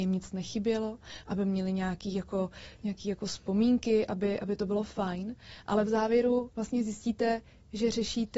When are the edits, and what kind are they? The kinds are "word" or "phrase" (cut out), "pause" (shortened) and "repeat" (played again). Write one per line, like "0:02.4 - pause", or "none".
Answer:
none